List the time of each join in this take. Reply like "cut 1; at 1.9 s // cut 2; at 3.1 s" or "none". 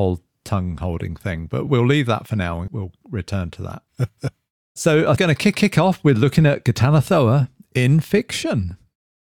cut 1; at 1.7 s // cut 2; at 2.7 s // cut 3; at 3.9 s // cut 4; at 5.2 s // cut 5; at 5.5 s